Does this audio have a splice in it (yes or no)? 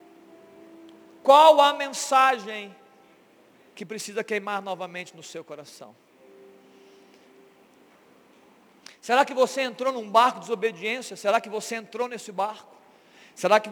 no